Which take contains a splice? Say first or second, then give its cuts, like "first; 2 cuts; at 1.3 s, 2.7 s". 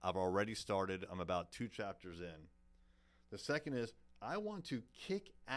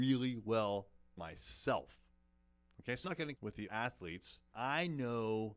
second; 5 cuts; at 1.2 s, 3.0 s, 3.3 s, 3.7 s, 4.5 s